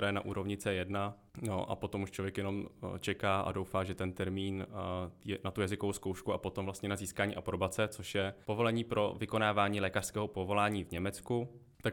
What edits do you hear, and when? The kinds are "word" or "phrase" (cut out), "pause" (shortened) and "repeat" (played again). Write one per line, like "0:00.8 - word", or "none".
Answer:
0:08.4 - pause